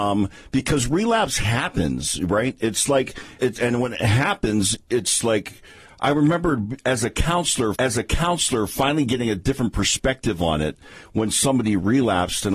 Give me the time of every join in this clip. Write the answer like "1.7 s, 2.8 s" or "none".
3.4 s, 7.8 s